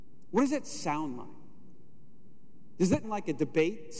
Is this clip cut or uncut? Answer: cut